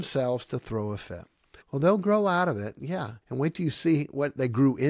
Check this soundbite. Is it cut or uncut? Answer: cut